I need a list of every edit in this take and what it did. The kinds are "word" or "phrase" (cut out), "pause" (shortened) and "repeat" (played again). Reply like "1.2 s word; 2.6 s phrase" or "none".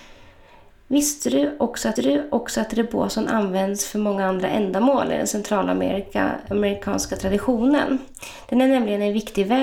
2.0 s repeat